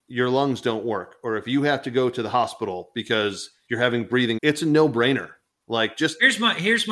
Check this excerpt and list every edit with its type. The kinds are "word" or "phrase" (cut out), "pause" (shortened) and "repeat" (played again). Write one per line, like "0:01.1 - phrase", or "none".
0:04.4 - word